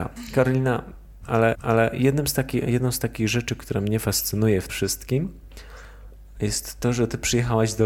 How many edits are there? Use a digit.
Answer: 2